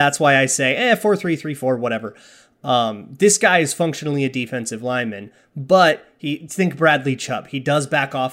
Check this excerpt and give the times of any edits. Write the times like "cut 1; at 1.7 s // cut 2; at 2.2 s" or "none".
none